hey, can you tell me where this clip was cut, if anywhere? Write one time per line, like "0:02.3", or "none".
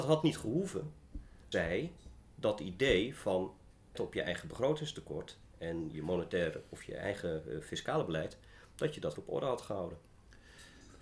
0:01.5
0:03.9
0:05.9
0:09.1